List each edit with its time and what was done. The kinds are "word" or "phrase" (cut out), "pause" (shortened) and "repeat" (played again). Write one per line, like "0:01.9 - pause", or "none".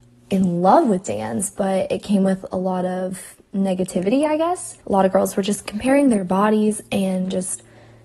0:04.8 - pause